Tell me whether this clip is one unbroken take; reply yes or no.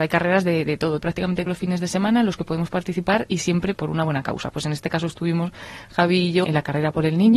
no